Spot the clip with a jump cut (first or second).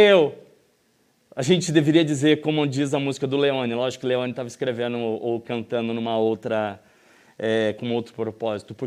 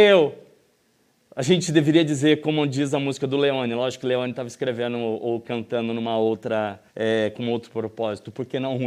second